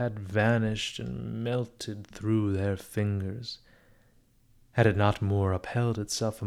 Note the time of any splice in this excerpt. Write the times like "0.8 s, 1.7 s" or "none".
none